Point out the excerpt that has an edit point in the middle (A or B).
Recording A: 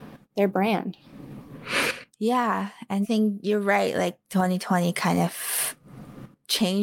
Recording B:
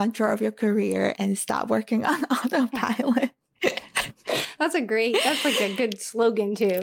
A